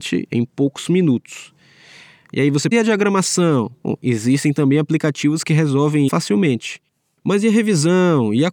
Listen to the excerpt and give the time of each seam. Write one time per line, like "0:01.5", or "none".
0:02.7
0:06.1